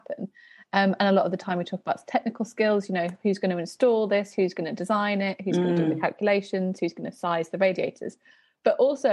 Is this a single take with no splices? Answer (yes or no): yes